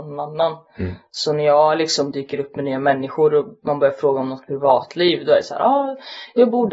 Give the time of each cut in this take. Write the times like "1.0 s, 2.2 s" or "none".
none

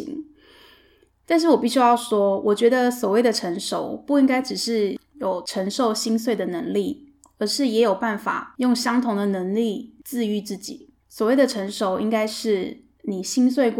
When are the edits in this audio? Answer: 11.0 s

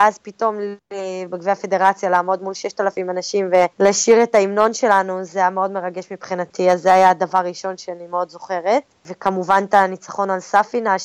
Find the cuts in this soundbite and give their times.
3.7 s

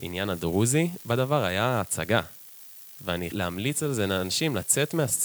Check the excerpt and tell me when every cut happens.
3.3 s

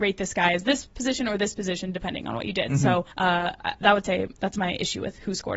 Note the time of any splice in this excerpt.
3.1 s

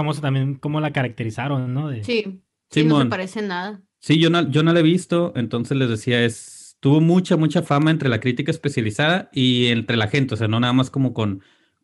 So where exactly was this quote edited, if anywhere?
none

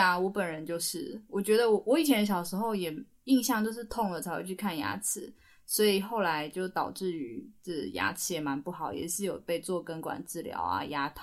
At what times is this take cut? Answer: none

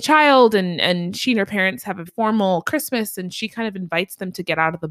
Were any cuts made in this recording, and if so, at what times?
2.1 s

